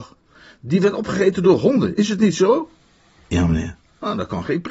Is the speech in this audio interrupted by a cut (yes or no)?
no